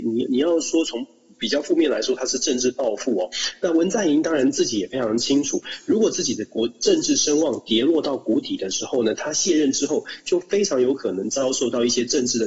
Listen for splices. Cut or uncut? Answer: uncut